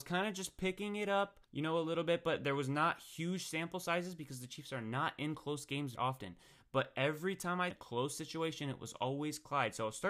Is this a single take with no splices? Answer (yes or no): no